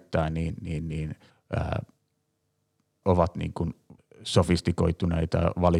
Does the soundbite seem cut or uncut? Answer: cut